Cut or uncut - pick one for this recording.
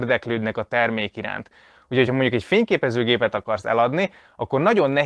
uncut